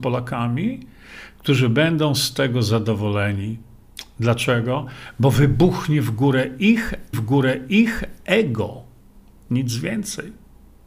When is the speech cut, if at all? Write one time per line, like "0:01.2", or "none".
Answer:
0:07.1